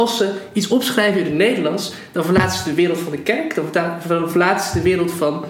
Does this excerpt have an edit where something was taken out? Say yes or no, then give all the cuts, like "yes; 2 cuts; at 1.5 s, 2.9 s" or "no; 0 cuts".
no; 0 cuts